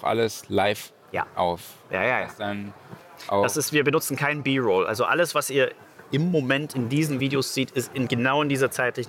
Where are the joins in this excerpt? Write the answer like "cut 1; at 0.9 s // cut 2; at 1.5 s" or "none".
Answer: none